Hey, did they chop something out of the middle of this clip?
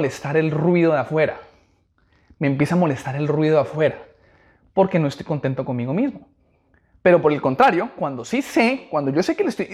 no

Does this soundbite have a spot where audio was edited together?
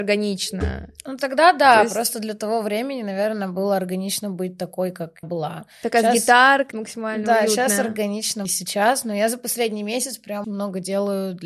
yes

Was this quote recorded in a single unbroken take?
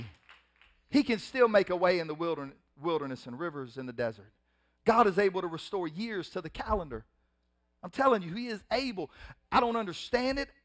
yes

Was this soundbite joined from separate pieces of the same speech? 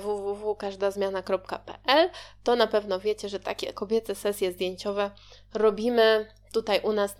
no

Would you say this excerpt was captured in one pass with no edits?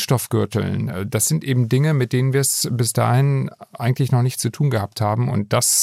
yes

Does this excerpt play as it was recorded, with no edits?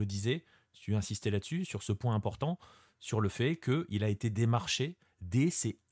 yes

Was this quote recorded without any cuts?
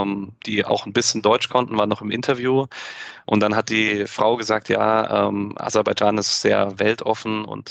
yes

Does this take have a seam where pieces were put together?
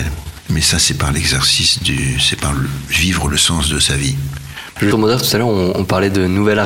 yes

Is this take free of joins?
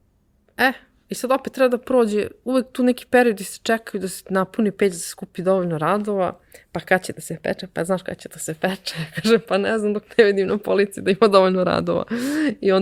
yes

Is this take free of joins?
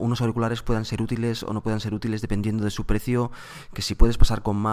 yes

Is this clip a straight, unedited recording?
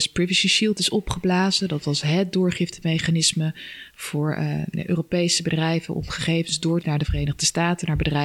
no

